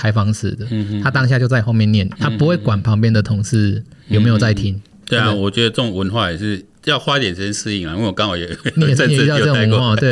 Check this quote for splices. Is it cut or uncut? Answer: uncut